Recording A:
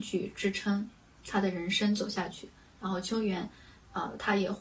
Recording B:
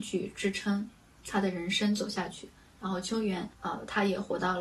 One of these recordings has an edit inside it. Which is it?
B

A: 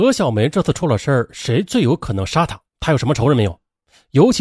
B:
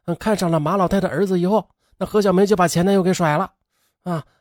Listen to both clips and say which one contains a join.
A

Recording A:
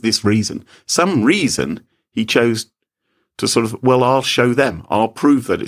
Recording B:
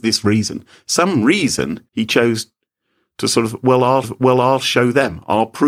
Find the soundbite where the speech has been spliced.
B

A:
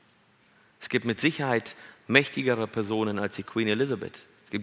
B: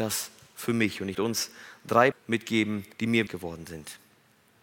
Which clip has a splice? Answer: B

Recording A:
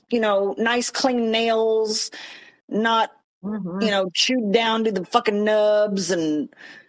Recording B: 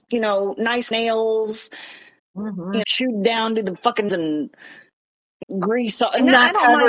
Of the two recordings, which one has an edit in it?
B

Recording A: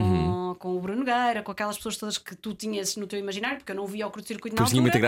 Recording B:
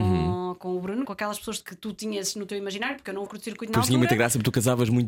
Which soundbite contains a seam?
B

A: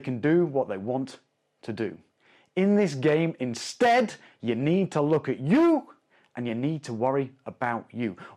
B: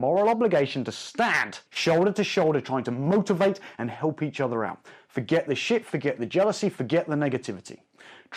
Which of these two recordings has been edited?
B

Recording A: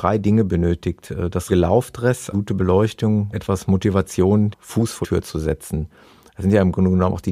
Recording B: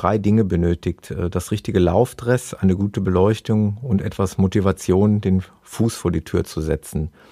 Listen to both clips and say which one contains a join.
A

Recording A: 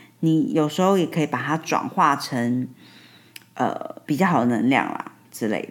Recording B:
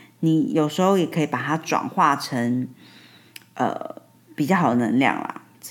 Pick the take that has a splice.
A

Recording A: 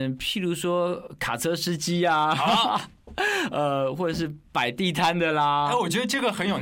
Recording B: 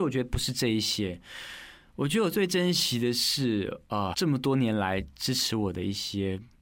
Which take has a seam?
B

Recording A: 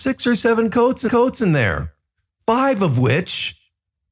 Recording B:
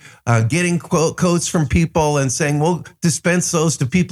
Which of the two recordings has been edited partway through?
A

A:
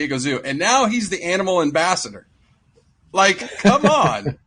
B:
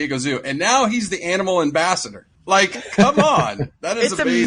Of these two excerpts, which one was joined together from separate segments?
B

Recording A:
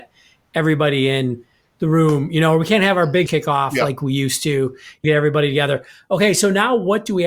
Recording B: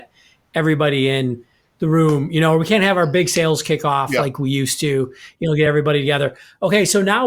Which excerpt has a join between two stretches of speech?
A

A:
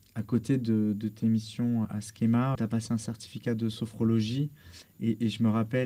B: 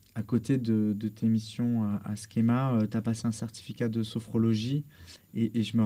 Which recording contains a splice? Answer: A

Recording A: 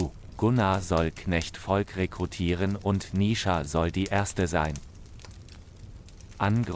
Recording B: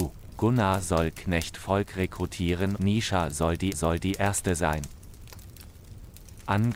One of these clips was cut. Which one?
B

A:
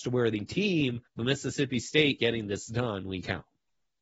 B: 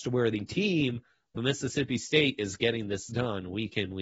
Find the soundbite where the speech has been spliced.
A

